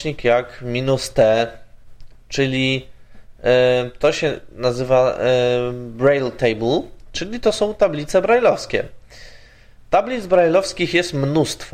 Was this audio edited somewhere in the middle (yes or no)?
no